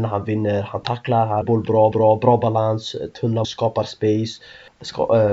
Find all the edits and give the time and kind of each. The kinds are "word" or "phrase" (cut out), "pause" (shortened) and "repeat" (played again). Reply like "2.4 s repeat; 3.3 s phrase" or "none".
1.4 s phrase; 1.9 s repeat; 3.4 s word